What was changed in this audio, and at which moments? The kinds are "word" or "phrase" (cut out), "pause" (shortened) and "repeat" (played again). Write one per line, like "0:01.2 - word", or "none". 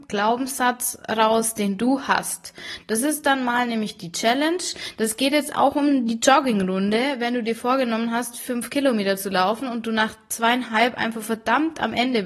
none